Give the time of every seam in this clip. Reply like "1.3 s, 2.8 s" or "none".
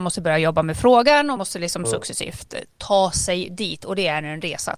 1.4 s